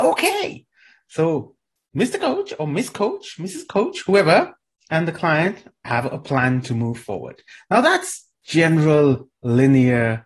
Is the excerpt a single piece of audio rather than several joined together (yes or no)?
yes